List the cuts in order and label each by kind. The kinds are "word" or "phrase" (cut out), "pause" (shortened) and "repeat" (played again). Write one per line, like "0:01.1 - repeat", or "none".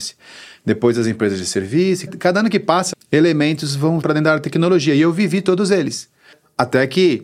0:02.1 - word
0:02.9 - word
0:04.0 - word